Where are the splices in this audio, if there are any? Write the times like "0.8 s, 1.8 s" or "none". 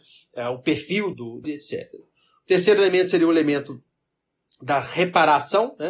1.1 s, 1.4 s